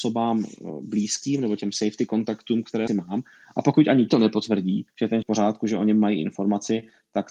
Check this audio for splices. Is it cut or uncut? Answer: cut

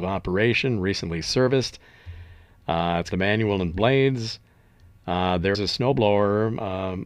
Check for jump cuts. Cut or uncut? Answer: cut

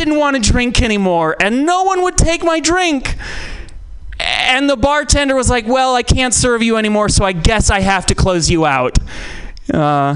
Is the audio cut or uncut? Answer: uncut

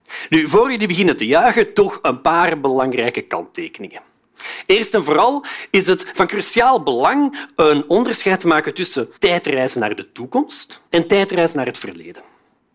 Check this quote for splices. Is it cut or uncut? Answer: cut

